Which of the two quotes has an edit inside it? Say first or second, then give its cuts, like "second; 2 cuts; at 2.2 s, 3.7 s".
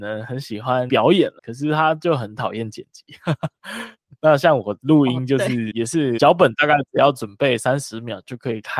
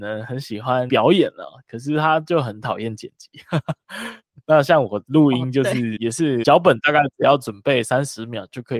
first; 1 cut; at 1.4 s